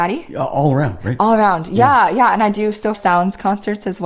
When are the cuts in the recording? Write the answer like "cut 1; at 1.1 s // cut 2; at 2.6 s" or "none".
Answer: cut 1; at 2.9 s